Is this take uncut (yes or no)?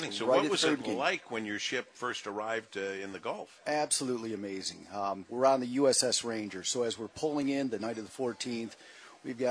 yes